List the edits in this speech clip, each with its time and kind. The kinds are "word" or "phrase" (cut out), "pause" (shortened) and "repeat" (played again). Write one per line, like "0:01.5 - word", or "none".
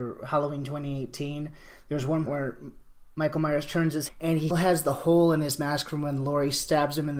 0:02.3 - word
0:04.1 - word
0:04.5 - word